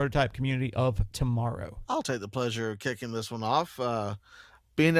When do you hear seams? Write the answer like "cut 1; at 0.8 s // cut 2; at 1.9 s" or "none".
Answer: none